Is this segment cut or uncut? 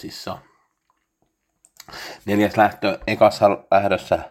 uncut